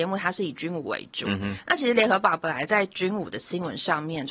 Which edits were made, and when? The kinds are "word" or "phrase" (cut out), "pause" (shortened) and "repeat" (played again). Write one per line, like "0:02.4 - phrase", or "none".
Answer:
none